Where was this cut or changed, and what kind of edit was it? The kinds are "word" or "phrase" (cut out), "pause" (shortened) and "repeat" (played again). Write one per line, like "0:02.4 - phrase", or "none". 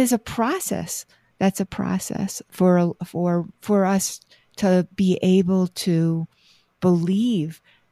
0:03.5 - pause